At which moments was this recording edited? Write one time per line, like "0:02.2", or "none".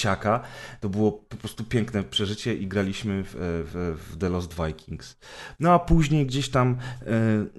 none